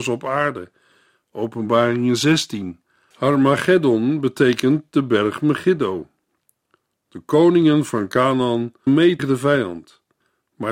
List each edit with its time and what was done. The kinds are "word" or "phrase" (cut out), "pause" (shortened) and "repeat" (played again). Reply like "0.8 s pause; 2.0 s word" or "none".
8.9 s word; 9.2 s word